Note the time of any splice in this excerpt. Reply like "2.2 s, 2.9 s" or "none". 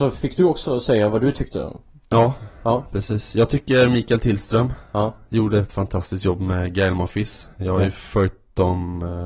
none